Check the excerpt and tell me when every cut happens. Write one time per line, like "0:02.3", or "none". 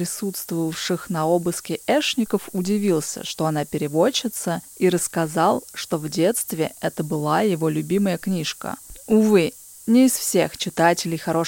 none